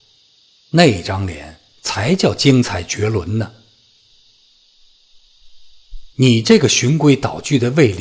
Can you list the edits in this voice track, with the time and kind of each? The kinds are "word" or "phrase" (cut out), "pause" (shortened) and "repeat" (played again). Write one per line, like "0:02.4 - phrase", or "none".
0:06.1 - pause